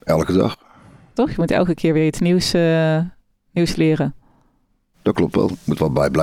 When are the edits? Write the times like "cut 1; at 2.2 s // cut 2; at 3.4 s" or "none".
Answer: none